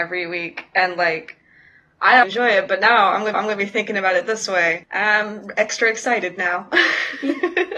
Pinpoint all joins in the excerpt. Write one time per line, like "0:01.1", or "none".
0:02.2
0:03.3